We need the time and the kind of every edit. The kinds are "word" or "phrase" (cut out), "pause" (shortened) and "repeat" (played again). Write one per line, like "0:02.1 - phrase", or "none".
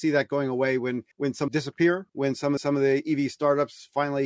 0:01.1 - pause
0:01.5 - phrase
0:02.1 - pause
0:02.6 - repeat